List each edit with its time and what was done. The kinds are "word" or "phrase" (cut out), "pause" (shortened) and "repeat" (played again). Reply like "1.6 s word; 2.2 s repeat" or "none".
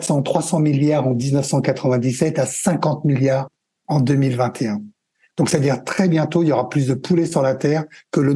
none